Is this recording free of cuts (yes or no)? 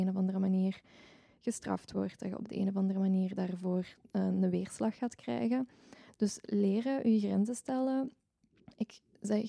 yes